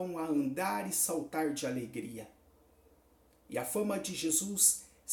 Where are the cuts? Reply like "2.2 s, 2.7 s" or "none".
none